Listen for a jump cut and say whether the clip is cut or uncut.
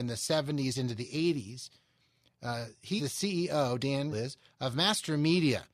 cut